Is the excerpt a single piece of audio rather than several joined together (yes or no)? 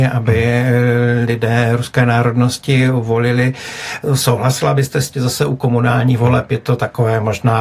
no